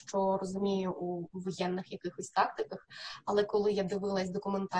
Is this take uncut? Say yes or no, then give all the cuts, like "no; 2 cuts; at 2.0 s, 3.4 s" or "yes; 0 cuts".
yes; 0 cuts